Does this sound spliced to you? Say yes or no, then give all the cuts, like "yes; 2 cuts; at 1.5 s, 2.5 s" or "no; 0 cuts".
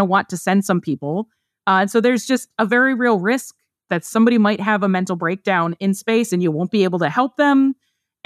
no; 0 cuts